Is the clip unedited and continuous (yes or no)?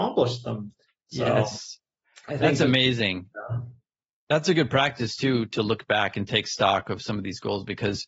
yes